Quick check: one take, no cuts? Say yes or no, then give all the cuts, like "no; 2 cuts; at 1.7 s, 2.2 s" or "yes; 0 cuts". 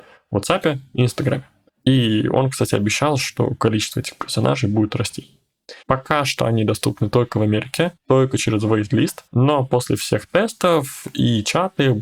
no; 4 cuts; at 1.7 s, 5.8 s, 8.0 s, 9.3 s